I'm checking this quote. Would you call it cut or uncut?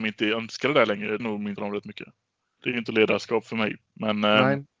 cut